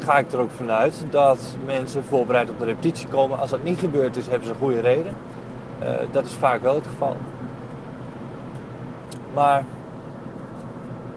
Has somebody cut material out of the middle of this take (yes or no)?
no